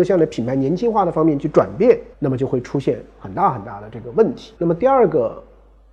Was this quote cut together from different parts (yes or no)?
yes